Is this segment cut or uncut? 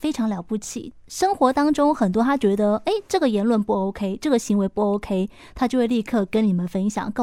uncut